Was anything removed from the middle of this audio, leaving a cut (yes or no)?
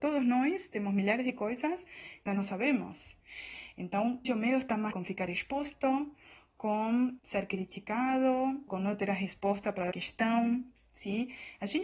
yes